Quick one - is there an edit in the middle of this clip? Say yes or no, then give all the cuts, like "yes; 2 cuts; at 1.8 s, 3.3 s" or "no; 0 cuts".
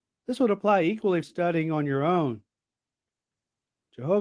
yes; 1 cut; at 1.2 s